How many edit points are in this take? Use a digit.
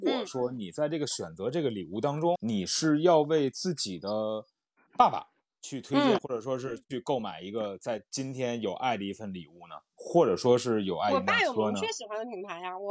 2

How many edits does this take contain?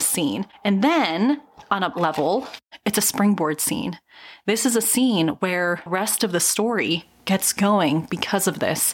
2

